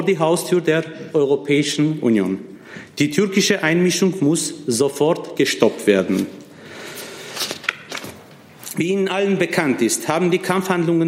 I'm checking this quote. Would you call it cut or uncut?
uncut